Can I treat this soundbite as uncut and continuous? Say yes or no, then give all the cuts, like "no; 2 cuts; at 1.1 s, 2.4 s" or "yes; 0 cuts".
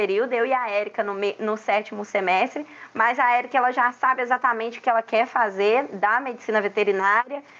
yes; 0 cuts